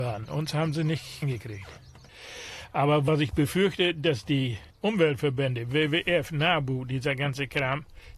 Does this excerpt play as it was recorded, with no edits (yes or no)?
no